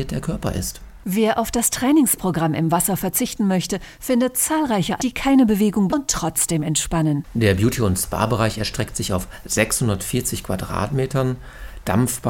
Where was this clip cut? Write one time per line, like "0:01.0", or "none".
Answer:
0:05.0
0:05.9